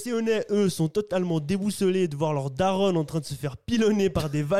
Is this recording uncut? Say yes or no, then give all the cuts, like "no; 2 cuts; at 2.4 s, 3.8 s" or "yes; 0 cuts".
yes; 0 cuts